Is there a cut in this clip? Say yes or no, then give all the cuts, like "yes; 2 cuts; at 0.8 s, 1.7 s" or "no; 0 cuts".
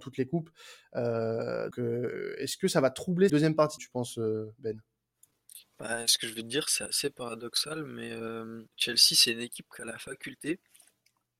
yes; 4 cuts; at 1.7 s, 3.3 s, 3.8 s, 8.7 s